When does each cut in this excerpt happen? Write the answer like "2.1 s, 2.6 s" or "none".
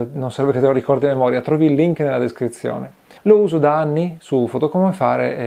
3.2 s